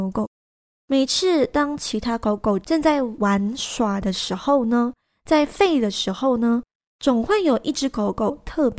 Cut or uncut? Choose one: uncut